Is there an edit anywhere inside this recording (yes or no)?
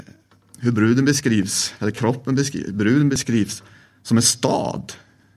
no